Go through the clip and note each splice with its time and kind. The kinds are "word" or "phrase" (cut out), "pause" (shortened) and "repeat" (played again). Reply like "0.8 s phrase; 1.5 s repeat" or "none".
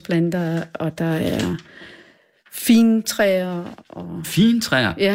none